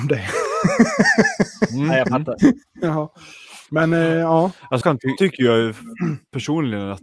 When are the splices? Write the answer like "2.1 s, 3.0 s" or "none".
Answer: 3.7 s, 4.8 s, 5.2 s